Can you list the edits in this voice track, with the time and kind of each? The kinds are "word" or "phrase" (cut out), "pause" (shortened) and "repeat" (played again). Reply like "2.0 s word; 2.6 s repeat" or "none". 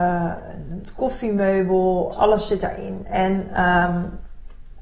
2.1 s word